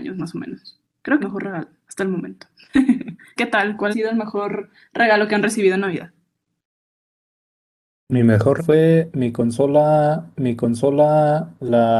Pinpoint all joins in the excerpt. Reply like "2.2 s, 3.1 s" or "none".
1.2 s, 3.4 s, 3.9 s, 8.6 s, 10.3 s